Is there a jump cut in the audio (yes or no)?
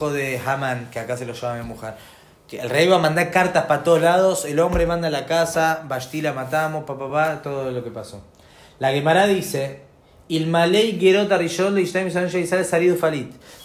no